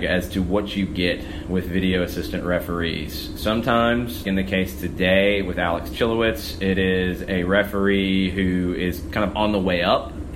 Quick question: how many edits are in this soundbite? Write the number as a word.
one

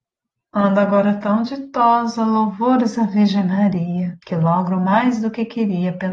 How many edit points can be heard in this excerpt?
one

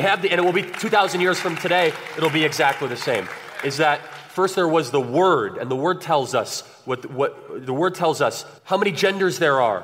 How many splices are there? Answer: one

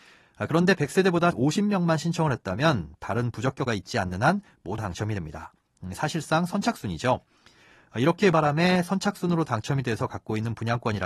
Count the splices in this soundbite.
four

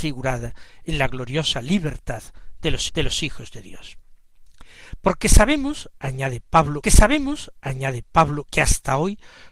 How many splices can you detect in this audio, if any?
two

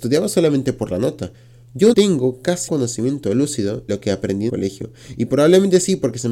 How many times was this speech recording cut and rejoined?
four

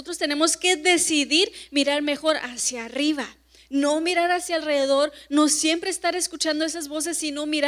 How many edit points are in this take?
zero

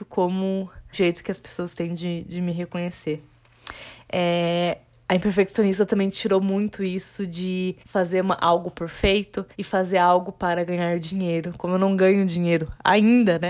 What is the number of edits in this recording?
three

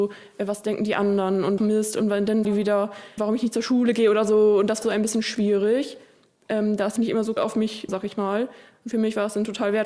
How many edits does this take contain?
seven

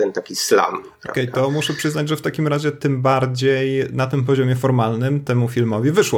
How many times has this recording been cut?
zero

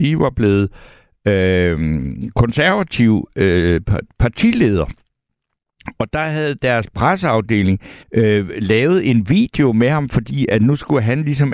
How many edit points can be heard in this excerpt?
one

